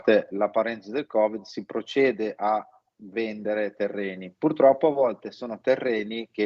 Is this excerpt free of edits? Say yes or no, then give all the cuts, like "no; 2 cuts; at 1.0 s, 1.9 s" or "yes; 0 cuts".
yes; 0 cuts